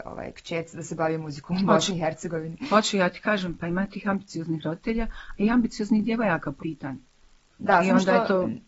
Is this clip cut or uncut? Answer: cut